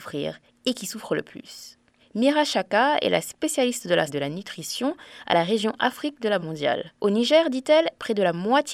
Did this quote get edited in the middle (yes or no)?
yes